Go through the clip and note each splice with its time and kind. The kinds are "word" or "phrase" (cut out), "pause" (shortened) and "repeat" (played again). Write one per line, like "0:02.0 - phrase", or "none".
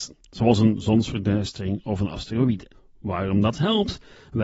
0:02.7 - pause